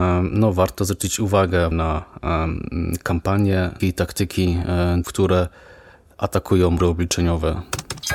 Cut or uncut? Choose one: cut